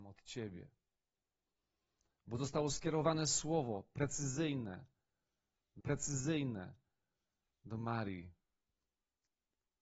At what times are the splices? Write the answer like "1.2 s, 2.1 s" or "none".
5.8 s